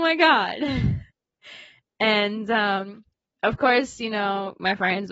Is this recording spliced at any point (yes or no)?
yes